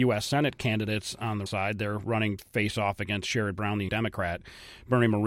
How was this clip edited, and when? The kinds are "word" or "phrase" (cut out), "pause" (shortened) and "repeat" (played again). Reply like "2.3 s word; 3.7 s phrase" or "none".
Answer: 1.5 s word; 2.4 s word; 3.9 s word